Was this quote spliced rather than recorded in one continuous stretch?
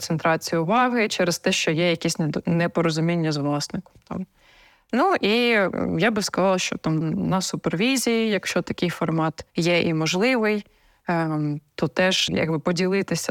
yes; 3 cuts; at 7.0 s, 9.5 s, 12.3 s

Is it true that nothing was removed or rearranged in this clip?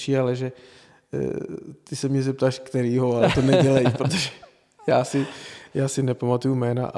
yes; 0 cuts

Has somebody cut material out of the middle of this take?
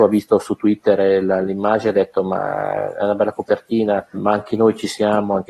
yes; 1 cut; at 4.1 s

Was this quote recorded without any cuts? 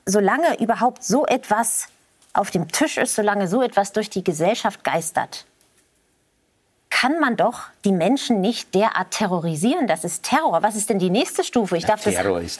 yes; 0 cuts

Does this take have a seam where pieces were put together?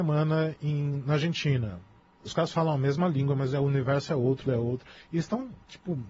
yes; 2 cuts; at 2.0 s, 4.5 s

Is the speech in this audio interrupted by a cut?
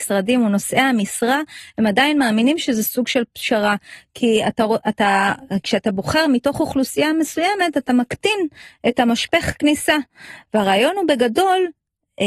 no; 0 cuts

